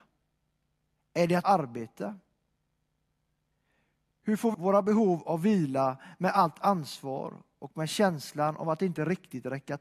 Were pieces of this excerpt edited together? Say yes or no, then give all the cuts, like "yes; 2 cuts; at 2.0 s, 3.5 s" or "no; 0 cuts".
yes; 2 cuts; at 1.4 s, 4.5 s